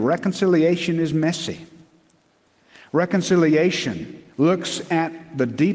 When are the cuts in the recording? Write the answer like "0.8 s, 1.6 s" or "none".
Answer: 4.3 s